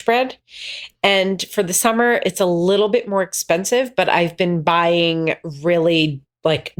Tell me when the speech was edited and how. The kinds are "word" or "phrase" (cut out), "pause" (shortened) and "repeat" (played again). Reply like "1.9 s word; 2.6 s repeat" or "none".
none